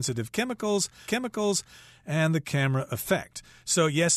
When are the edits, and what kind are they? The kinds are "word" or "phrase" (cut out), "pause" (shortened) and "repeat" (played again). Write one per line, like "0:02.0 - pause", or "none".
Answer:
0:01.1 - repeat
0:02.9 - word